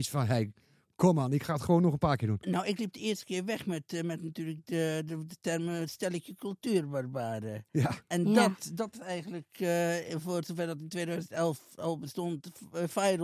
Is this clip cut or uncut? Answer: uncut